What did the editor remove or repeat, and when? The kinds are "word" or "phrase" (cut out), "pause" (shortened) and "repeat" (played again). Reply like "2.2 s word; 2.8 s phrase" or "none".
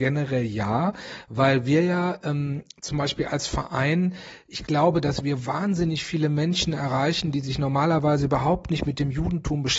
none